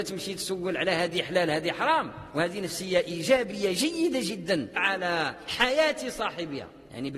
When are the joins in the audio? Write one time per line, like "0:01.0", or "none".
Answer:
0:04.8